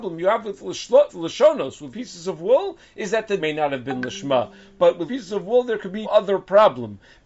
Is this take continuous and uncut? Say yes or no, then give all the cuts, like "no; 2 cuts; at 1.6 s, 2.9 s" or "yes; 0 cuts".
no; 5 cuts; at 1.1 s, 1.9 s, 3.4 s, 5.1 s, 6.0 s